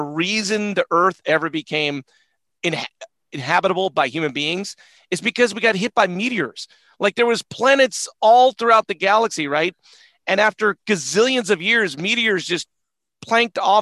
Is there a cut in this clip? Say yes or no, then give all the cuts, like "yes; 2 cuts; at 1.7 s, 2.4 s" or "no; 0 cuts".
no; 0 cuts